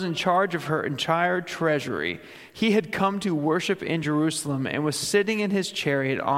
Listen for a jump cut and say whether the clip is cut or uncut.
uncut